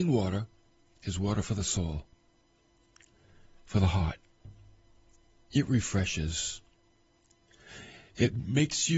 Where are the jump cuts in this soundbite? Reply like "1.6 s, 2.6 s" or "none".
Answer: none

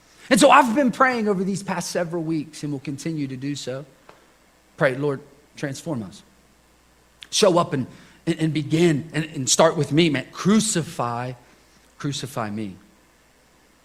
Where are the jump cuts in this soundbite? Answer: none

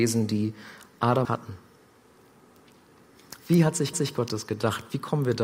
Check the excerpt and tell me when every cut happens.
1.2 s, 3.9 s

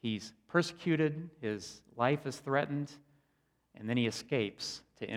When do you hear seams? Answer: none

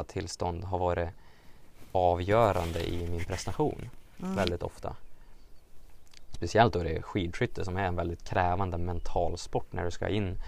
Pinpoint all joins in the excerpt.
none

